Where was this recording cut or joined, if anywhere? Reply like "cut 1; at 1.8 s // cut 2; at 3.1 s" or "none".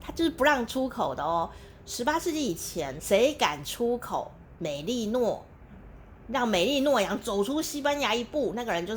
cut 1; at 3.0 s